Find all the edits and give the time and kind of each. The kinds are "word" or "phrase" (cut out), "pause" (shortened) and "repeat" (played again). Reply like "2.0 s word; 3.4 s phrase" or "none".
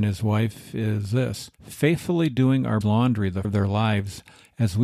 1.5 s pause; 2.8 s word; 3.4 s phrase

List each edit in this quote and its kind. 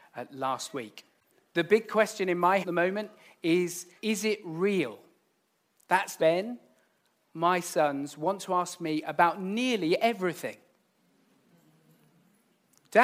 2.6 s phrase; 4.0 s pause; 6.2 s phrase

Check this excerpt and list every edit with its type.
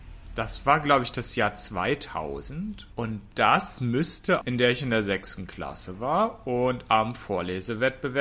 4.4 s phrase

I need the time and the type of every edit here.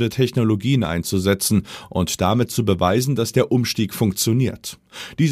none

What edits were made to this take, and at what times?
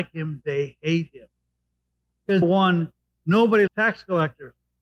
2.4 s word; 3.7 s word

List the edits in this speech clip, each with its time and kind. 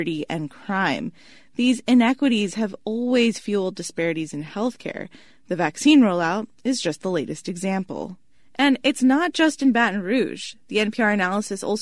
none

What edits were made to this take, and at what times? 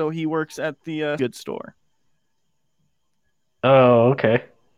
1.2 s word

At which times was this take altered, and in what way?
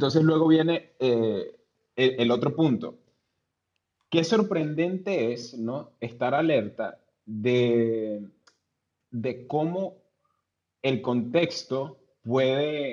none

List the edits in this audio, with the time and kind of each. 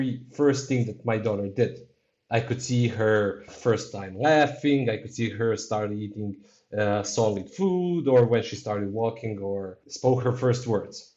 none

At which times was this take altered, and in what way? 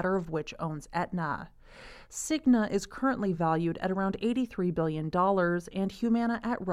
none

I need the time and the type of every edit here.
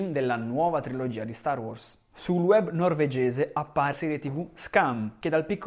3.9 s word

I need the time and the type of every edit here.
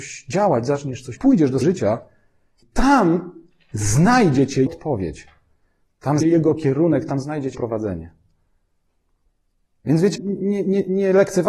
1.1 s word; 1.6 s word; 4.7 s word; 6.2 s word; 7.5 s word; 10.2 s word

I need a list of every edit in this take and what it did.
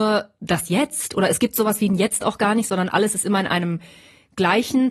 none

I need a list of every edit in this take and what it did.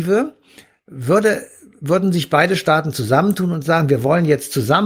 none

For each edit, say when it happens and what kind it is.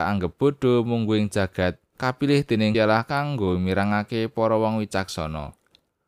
1.9 s pause; 2.7 s word

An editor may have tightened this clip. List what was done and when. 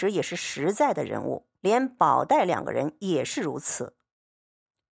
1.6 s pause

